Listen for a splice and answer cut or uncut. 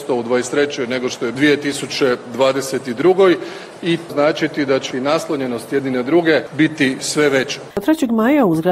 cut